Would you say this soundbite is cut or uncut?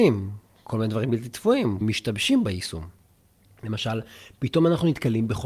cut